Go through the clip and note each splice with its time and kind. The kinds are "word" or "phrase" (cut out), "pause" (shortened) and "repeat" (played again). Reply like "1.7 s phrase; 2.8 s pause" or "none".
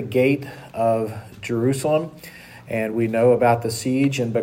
none